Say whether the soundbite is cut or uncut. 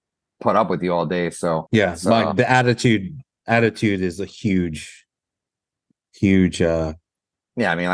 uncut